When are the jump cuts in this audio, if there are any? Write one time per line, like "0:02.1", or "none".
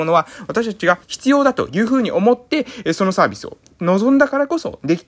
0:01.0

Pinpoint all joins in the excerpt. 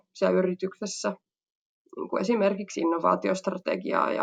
none

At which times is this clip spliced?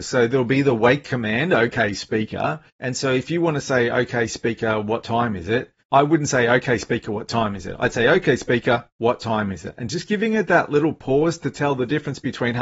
0:02.7
0:05.8
0:08.9

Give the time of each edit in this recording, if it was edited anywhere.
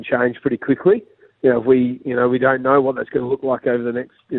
none

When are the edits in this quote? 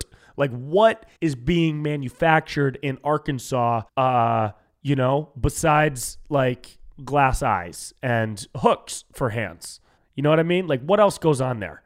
0:01.1
0:03.9
0:10.0

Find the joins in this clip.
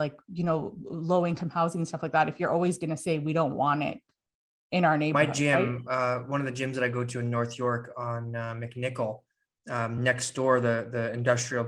none

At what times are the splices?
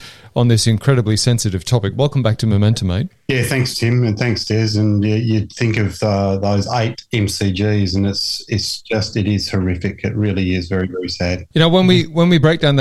0:11.5

